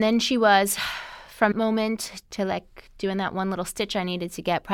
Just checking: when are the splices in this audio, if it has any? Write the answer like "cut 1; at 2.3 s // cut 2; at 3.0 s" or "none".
cut 1; at 1.5 s